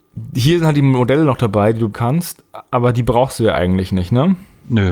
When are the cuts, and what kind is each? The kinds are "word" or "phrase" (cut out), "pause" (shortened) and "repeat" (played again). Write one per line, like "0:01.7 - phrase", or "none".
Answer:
0:01.9 - word